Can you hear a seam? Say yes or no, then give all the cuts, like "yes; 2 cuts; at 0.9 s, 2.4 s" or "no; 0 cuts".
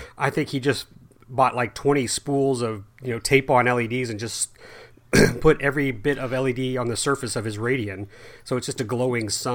no; 0 cuts